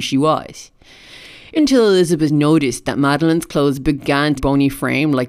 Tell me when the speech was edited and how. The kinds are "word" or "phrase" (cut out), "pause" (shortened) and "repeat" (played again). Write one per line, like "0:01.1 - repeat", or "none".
0:01.6 - word
0:04.4 - phrase